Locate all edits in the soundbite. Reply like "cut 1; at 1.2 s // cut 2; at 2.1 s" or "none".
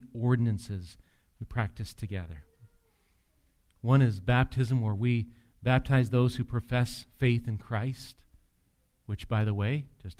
none